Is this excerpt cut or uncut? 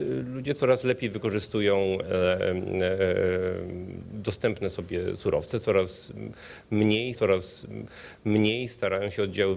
cut